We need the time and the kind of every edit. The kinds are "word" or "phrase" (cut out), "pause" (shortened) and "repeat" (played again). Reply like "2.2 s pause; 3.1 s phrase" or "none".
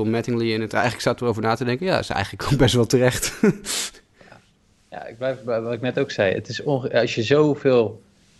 none